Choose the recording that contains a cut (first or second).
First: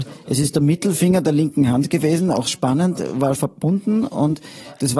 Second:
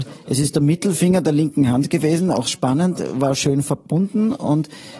first